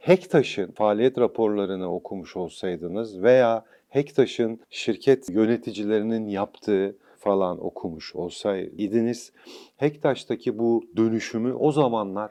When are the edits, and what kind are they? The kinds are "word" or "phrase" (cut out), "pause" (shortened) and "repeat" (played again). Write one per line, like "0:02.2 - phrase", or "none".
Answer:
0:07.1 - word